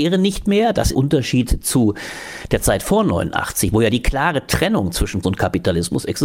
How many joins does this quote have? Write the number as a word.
two